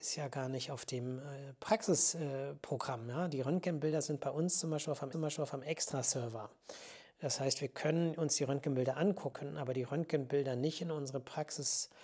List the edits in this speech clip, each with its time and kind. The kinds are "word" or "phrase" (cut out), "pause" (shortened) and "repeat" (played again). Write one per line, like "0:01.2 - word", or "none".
0:05.1 - repeat
0:09.3 - word